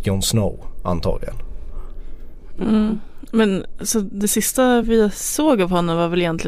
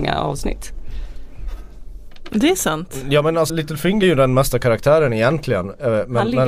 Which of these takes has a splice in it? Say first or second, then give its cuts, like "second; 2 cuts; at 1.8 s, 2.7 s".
second; 3 cuts; at 3.5 s, 4.0 s, 4.5 s